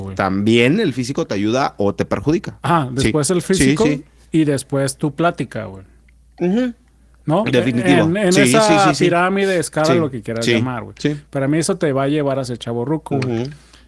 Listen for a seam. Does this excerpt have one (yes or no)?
no